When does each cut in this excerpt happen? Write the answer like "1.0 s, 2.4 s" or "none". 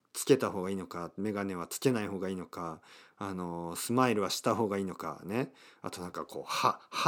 none